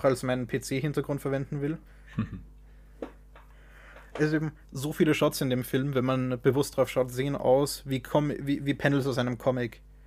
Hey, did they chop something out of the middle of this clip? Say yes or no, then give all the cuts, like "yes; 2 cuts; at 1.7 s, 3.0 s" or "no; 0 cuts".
yes; 1 cut; at 1.9 s